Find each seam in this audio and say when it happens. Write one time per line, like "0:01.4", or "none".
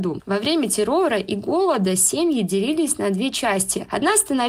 none